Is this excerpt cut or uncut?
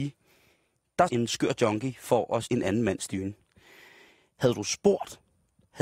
cut